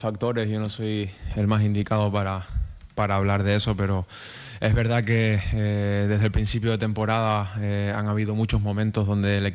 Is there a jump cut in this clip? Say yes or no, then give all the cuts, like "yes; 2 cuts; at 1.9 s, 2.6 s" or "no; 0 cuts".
no; 0 cuts